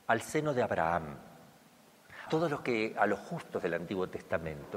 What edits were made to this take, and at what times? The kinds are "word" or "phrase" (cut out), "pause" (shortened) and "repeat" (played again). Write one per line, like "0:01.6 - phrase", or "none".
0:02.3 - word